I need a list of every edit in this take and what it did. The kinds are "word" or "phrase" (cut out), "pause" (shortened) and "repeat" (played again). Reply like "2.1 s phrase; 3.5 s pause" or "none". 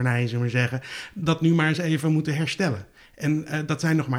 none